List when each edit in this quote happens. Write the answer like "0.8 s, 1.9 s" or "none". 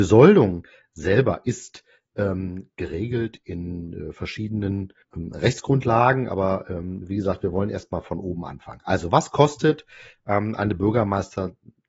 5.0 s